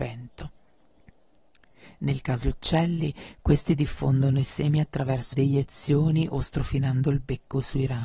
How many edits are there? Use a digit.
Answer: 2